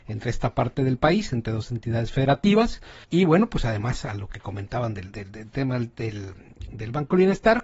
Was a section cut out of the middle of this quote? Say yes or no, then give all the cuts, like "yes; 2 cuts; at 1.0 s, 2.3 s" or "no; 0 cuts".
yes; 1 cut; at 3.0 s